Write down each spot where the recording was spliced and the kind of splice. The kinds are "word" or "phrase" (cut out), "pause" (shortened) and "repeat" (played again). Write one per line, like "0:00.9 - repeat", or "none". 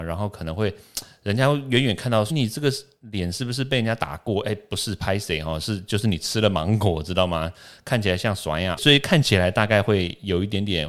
0:02.3 - word
0:08.8 - phrase